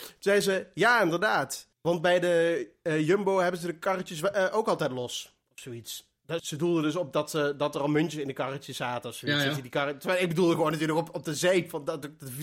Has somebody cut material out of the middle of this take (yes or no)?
yes